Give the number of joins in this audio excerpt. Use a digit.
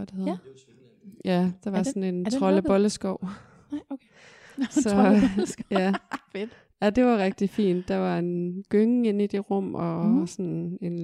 0